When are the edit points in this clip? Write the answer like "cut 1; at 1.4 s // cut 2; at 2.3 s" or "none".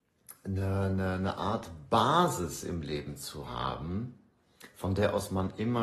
none